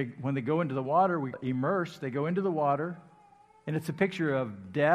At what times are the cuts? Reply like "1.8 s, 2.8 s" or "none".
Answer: 1.3 s